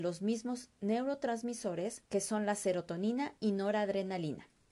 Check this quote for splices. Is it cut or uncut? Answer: cut